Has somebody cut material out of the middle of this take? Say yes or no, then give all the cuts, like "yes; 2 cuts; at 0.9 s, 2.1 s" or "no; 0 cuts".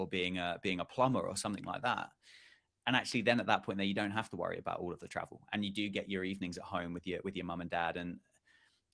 no; 0 cuts